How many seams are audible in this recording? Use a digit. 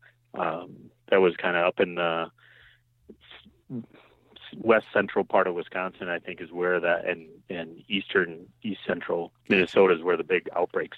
1